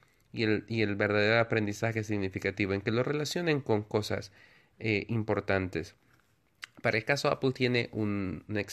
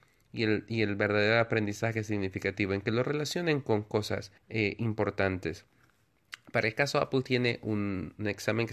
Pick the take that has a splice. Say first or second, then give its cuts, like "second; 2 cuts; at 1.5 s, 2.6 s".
second; 1 cut; at 4.4 s